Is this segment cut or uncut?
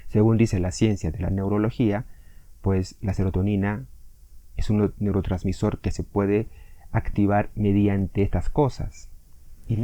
uncut